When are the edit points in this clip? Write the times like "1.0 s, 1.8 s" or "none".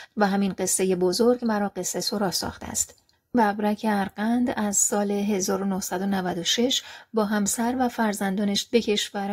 none